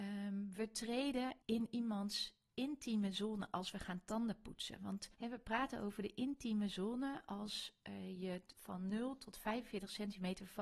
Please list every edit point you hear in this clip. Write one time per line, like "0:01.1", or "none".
0:01.4
0:05.1